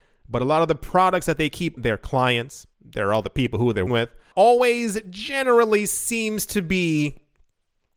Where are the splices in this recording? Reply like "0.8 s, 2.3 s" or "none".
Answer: 1.8 s, 2.7 s, 3.9 s, 4.3 s